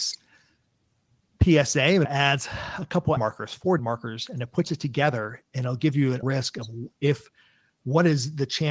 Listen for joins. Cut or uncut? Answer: cut